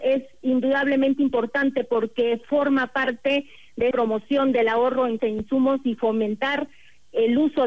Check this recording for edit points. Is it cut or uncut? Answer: cut